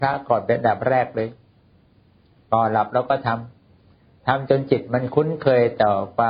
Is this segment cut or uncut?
uncut